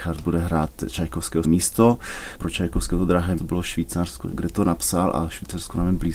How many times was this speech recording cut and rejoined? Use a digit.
2